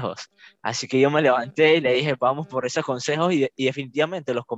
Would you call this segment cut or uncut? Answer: uncut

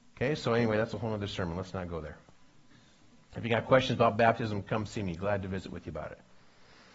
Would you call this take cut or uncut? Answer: uncut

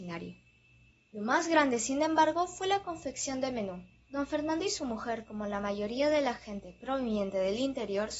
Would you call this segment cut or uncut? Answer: cut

